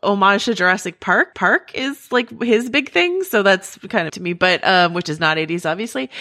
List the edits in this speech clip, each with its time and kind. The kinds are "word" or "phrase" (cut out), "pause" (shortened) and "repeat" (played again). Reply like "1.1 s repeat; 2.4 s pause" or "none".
1.3 s repeat; 4.1 s phrase